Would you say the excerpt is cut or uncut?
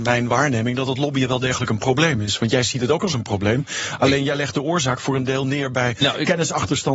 uncut